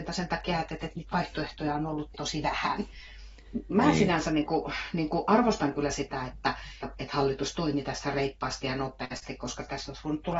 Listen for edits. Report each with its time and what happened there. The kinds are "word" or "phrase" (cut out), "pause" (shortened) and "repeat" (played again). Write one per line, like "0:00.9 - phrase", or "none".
0:02.1 - word
0:06.8 - word

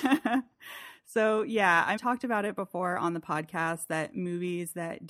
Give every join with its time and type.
0:02.0 - phrase

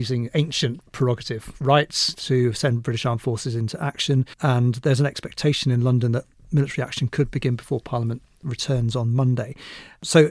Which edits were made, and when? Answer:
0:04.3 - pause

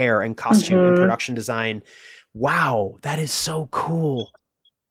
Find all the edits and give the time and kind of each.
none

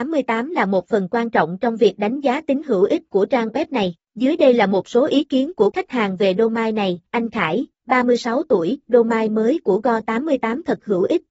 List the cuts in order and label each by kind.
0:04.0 - pause
0:05.7 - word
0:07.1 - pause

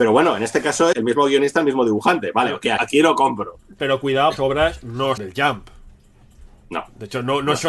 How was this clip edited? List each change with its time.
0:00.9 - word
0:02.8 - word
0:04.4 - phrase
0:05.2 - word

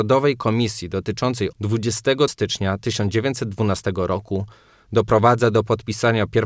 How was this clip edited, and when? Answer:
0:01.5 - word
0:02.3 - word

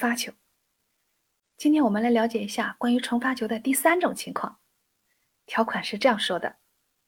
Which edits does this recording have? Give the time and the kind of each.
none

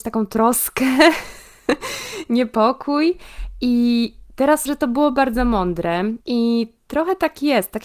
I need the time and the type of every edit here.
0:04.7 - word
0:06.2 - pause

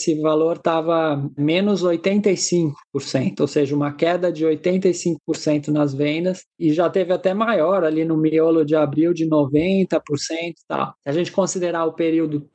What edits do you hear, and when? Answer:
0:11.0 - pause

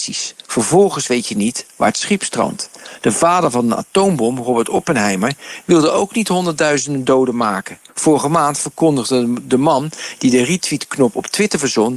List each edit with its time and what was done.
0:07.9 - pause

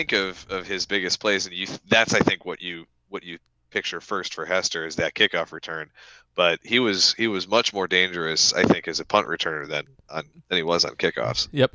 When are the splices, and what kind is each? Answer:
none

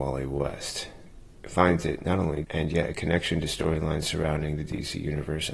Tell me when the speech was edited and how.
0:02.4 - word

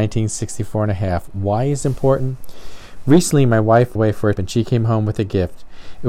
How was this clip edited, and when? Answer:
0:01.8 - word
0:04.0 - word
0:04.4 - word

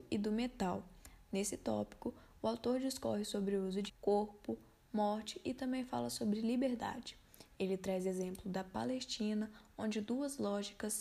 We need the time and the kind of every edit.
0:03.9 - word

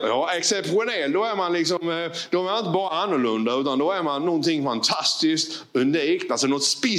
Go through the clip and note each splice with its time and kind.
none

